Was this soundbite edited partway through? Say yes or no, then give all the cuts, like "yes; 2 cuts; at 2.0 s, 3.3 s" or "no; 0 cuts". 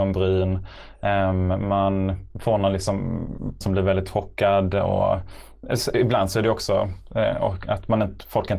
yes; 2 cuts; at 2.3 s, 3.6 s